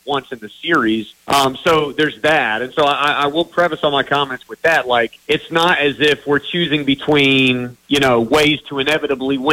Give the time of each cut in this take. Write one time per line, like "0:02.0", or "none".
0:01.2
0:05.2